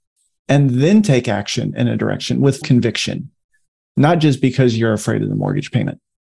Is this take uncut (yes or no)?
no